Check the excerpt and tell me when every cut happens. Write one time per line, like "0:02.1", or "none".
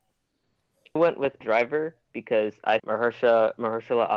0:01.0
0:01.4
0:02.8